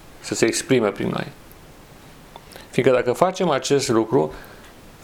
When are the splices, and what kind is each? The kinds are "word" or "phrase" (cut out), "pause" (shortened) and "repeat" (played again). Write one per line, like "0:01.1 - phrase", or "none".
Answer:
none